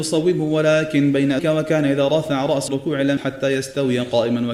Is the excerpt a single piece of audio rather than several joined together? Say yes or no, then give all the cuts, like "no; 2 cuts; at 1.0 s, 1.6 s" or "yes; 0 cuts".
no; 3 cuts; at 1.4 s, 2.7 s, 3.2 s